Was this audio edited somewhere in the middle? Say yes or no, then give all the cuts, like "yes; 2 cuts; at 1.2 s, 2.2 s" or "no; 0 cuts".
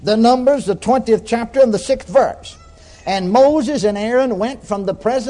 no; 0 cuts